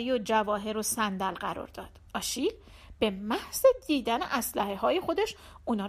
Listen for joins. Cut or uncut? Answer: cut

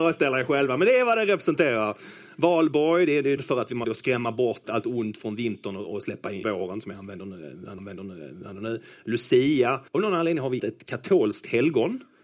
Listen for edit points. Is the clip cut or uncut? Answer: cut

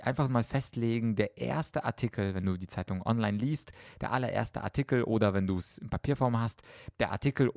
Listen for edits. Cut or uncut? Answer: uncut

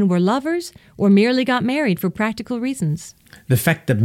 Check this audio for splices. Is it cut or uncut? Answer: uncut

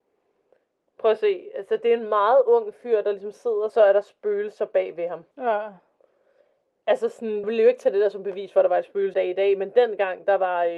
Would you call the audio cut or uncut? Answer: cut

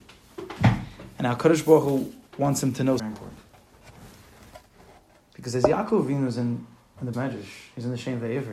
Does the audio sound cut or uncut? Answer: cut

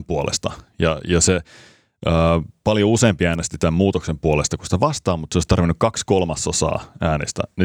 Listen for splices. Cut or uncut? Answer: uncut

